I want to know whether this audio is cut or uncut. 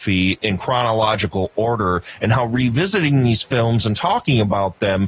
uncut